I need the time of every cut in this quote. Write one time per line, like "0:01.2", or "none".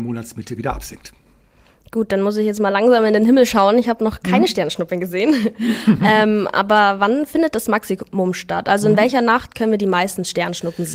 none